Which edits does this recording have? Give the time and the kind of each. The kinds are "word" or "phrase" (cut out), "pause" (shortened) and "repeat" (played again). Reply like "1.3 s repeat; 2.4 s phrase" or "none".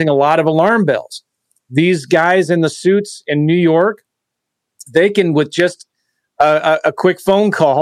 none